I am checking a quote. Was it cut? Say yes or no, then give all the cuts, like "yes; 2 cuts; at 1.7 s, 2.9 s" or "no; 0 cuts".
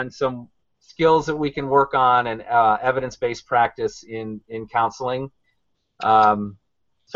no; 0 cuts